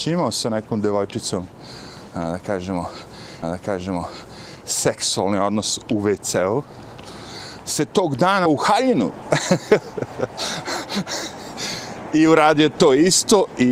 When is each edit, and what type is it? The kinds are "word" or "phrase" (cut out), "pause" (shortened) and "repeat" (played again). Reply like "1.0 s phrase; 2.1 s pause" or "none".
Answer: 3.4 s repeat; 8.5 s word